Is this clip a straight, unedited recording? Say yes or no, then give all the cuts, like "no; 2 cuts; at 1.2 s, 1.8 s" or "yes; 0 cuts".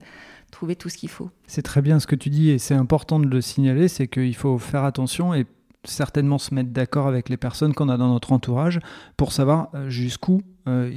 yes; 0 cuts